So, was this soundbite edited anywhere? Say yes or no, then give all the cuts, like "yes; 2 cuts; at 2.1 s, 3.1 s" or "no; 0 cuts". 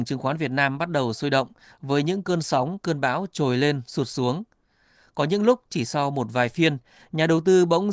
no; 0 cuts